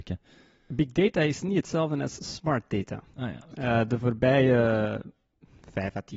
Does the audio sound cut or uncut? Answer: uncut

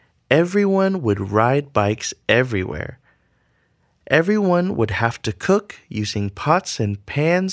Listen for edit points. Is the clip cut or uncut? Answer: uncut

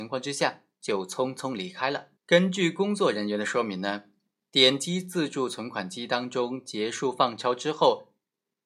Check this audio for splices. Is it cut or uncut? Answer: cut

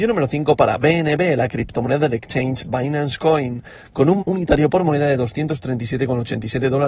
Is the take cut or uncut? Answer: cut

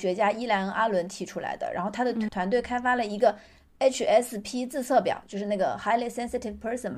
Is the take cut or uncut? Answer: cut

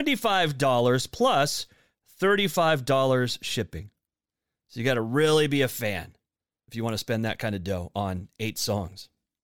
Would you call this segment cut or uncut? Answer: uncut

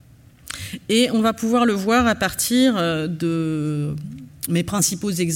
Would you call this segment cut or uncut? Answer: uncut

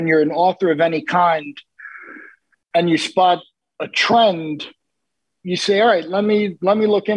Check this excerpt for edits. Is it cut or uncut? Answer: uncut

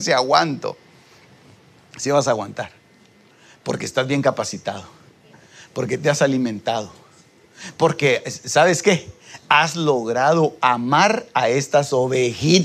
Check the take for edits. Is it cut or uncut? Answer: uncut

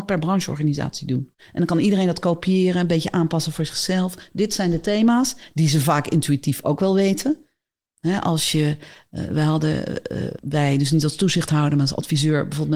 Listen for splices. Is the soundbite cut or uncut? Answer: cut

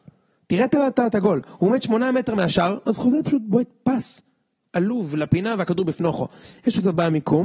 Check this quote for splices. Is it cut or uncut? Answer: uncut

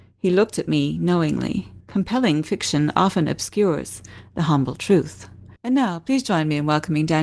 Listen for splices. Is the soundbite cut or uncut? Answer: cut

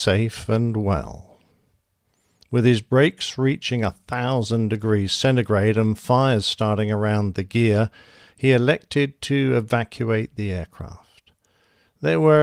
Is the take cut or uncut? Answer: uncut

